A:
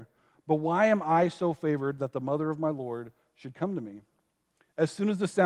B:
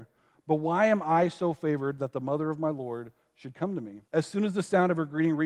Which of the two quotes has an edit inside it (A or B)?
B